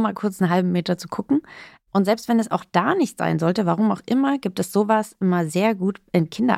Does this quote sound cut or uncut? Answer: uncut